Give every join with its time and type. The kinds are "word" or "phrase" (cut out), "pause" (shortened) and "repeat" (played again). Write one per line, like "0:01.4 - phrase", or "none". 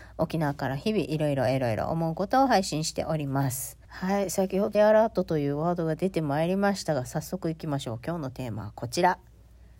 0:03.8 - pause
0:04.7 - word